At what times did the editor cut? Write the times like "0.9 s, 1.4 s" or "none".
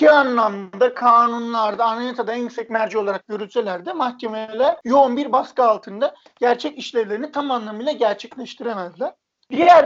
none

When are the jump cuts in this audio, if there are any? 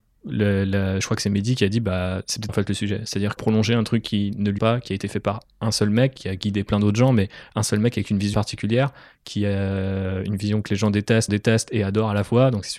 2.5 s, 3.4 s, 4.6 s, 8.3 s, 11.3 s

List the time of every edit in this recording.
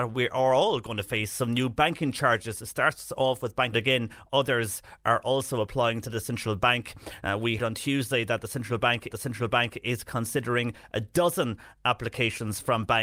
3.7 s, 7.6 s, 9.1 s

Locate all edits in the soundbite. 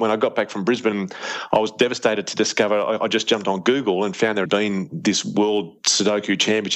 4.5 s

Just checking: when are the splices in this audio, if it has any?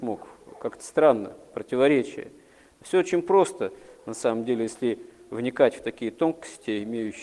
none

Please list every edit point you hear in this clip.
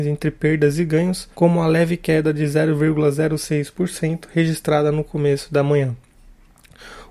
1.3 s

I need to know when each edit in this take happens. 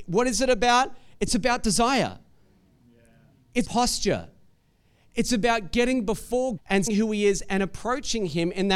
3.6 s, 6.6 s, 6.9 s

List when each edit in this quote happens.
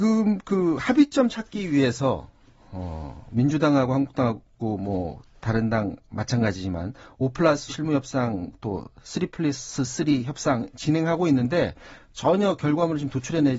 7.7 s

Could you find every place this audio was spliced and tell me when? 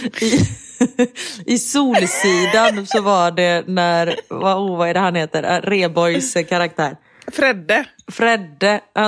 none

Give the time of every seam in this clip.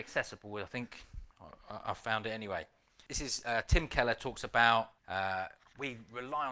3.1 s, 5.0 s

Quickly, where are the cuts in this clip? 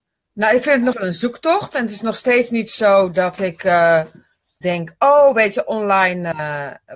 0.9 s, 4.6 s

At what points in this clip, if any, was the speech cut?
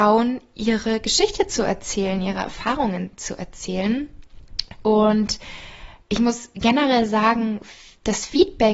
none

